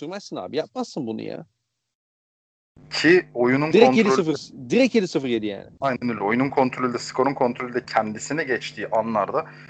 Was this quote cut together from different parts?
no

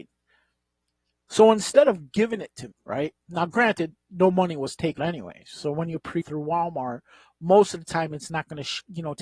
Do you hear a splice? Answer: yes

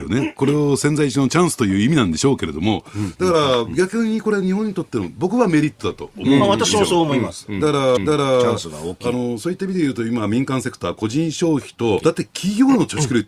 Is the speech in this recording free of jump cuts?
no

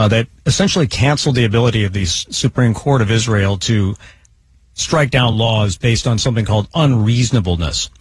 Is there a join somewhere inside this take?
no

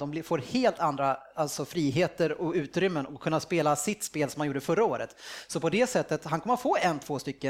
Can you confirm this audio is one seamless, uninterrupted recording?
yes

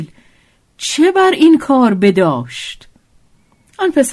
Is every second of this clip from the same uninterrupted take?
yes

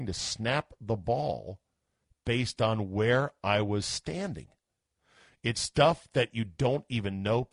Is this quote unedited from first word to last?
yes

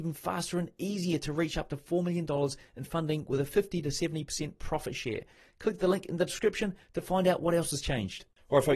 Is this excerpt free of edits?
yes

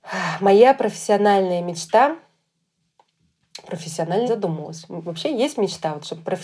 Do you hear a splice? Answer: yes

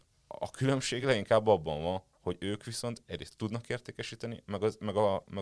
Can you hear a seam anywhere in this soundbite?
no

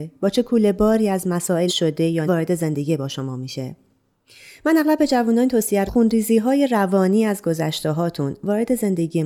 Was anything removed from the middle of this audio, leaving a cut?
yes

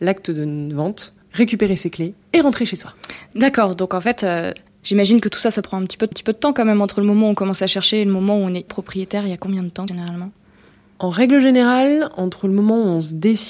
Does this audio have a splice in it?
yes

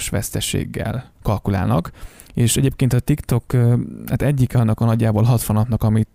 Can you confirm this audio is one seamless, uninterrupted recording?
no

